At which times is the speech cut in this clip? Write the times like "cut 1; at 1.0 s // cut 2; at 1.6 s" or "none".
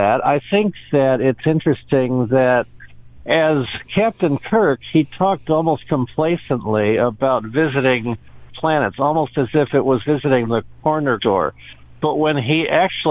cut 1; at 8.5 s // cut 2; at 10.0 s // cut 3; at 11.2 s